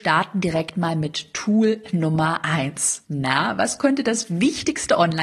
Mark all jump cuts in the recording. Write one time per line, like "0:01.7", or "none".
0:03.0